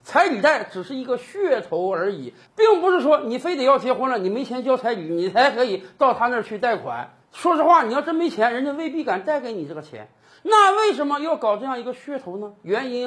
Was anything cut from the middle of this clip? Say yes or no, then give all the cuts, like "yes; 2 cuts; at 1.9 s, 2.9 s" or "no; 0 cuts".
no; 0 cuts